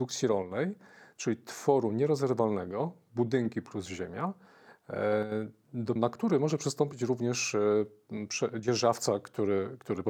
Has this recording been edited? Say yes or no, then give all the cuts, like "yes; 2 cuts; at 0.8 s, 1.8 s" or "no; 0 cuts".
yes; 1 cut; at 6.0 s